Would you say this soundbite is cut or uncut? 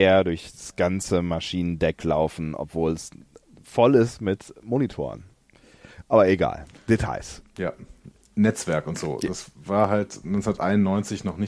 uncut